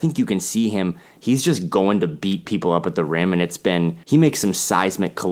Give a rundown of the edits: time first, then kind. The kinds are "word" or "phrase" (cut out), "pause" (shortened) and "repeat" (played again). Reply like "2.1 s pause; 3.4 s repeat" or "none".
4.0 s pause